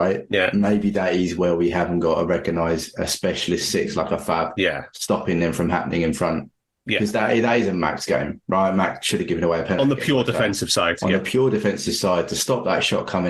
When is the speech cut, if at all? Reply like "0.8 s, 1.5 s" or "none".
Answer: none